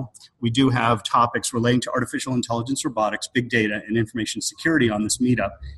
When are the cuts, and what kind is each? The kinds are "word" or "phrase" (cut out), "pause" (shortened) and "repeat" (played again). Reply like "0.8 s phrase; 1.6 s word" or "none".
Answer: none